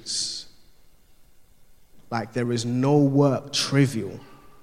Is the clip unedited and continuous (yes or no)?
yes